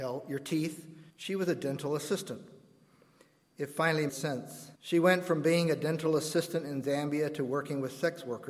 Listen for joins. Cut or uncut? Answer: cut